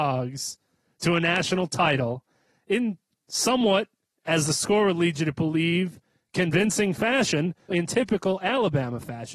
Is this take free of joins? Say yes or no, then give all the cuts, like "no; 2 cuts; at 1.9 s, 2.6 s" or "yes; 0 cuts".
no; 1 cut; at 7.7 s